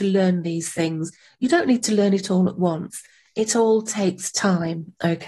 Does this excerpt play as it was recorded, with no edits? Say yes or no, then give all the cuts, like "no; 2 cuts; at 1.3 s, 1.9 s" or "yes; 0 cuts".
yes; 0 cuts